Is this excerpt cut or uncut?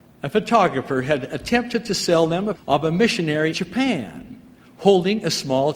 cut